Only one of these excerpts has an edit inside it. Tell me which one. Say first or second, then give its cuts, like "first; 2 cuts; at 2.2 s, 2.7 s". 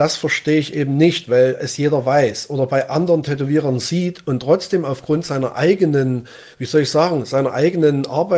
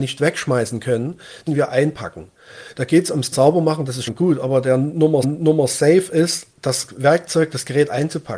second; 5 cuts; at 1.5 s, 3.3 s, 4.1 s, 5.2 s, 6.5 s